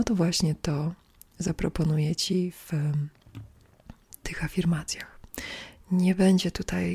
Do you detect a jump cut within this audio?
no; 0 cuts

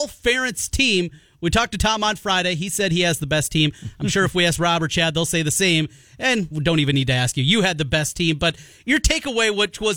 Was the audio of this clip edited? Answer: yes; 1 cut; at 6.5 s

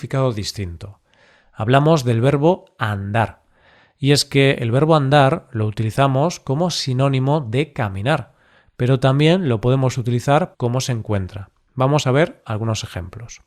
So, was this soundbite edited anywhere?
yes; 1 cut; at 10.5 s

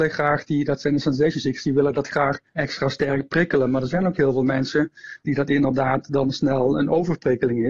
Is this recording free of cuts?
no; 1 cut; at 2.5 s

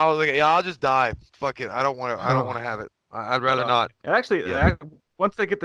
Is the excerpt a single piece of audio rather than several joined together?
no; 1 cut; at 4.0 s

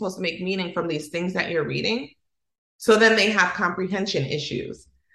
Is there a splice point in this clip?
no; 0 cuts

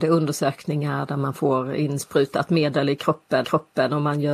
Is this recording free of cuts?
no; 1 cut; at 3.4 s

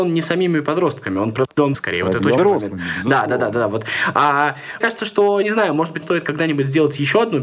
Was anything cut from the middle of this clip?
yes; 5 cuts; at 1.7 s, 2.4 s, 4.8 s, 5.4 s, 6.0 s

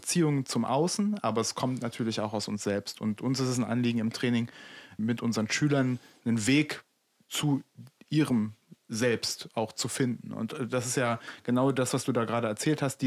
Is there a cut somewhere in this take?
yes; 1 cut; at 5.0 s

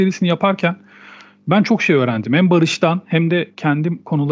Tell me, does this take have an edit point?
no; 0 cuts

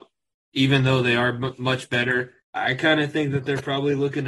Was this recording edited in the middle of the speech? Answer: yes; 1 cut; at 2.4 s

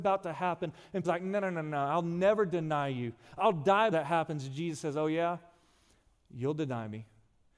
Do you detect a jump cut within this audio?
yes; 2 cuts; at 1.0 s, 3.9 s

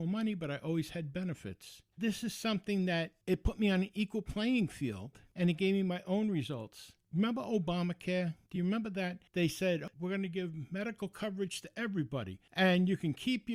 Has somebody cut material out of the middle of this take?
no; 0 cuts

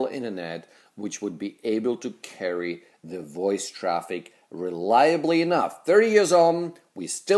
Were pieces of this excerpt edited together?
no; 0 cuts

